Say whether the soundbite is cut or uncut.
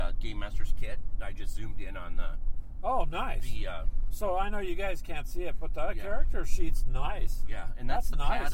uncut